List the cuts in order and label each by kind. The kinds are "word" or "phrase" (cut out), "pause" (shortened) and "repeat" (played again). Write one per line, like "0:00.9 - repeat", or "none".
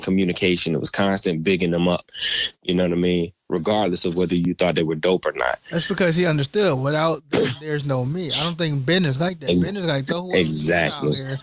none